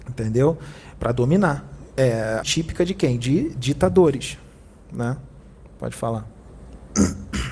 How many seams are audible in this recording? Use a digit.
1